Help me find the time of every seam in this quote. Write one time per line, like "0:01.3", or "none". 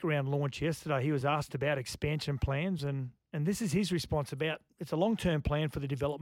none